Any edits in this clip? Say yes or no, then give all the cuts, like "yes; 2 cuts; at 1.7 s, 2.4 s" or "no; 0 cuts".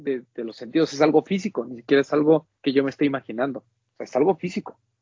yes; 1 cut; at 2.6 s